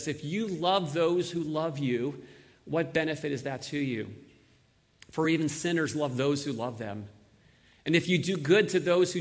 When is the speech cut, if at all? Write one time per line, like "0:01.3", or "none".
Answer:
none